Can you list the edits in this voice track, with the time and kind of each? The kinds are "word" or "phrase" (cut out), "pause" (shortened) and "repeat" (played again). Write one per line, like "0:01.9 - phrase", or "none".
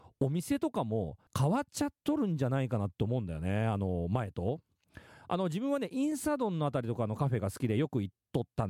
0:01.3 - pause